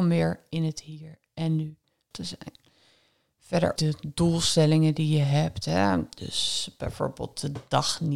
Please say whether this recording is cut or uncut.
cut